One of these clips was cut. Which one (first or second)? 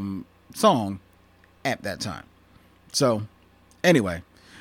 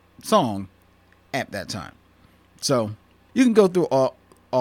second